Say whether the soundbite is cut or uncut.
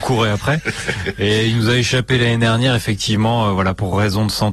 uncut